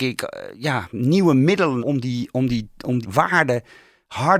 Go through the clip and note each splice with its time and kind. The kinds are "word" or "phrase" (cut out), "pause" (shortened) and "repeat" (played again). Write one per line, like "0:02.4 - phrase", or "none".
0:01.8 - word
0:03.0 - word